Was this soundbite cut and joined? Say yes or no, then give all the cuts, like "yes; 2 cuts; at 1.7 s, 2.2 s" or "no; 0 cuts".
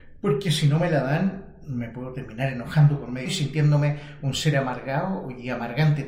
yes; 1 cut; at 3.3 s